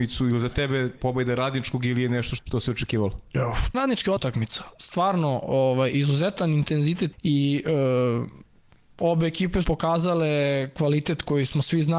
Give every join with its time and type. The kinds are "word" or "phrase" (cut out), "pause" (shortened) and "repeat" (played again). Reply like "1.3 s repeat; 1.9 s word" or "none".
1.0 s word; 2.4 s word; 3.7 s word; 4.2 s word; 7.1 s word; 9.6 s word